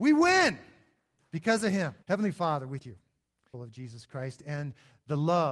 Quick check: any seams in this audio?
yes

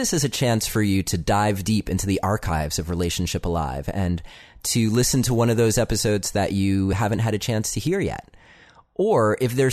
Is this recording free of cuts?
yes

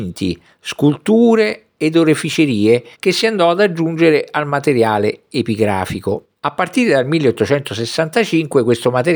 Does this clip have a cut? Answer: yes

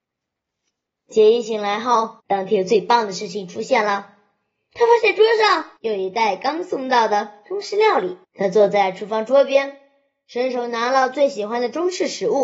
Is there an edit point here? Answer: yes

